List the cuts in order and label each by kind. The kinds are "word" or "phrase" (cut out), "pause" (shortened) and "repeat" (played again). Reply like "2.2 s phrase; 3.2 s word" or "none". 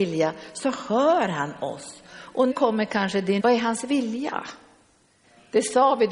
2.5 s word; 3.4 s word